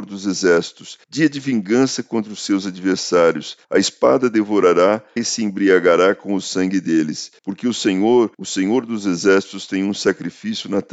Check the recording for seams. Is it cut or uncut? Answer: cut